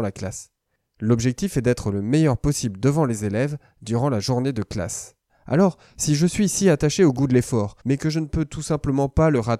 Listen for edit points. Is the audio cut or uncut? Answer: cut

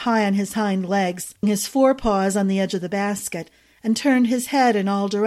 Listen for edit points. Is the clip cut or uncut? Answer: cut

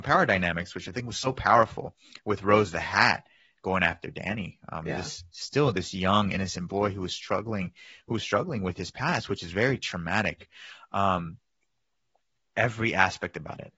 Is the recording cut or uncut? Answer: uncut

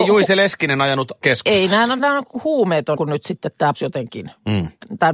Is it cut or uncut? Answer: cut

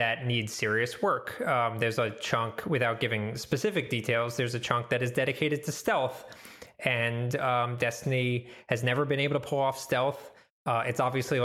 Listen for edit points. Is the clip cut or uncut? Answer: uncut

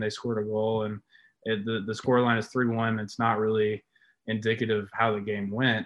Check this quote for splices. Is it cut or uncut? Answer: uncut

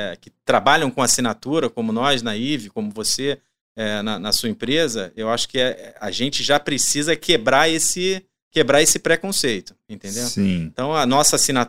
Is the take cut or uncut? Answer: uncut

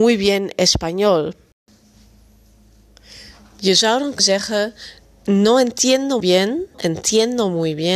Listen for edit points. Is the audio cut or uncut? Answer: cut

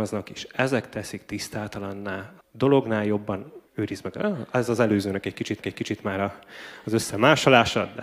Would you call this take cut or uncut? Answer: cut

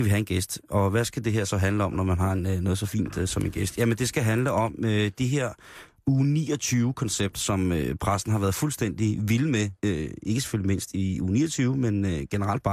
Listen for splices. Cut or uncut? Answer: cut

